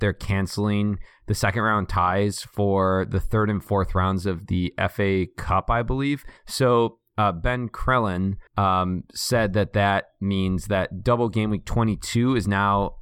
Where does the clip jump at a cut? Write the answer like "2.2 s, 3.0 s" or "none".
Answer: 6.4 s, 8.5 s